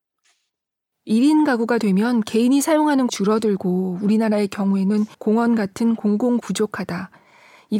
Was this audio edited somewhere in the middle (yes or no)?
yes